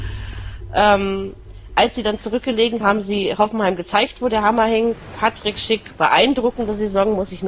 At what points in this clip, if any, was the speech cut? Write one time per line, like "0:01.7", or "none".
0:02.8